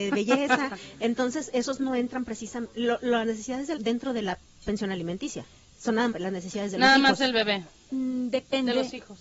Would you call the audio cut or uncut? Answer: cut